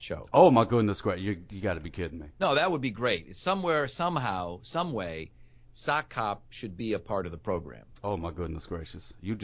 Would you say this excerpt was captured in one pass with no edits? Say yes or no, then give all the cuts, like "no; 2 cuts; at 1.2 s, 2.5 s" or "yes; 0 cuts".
yes; 0 cuts